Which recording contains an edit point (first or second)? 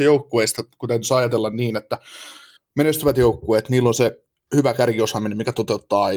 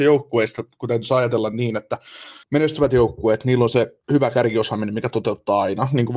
second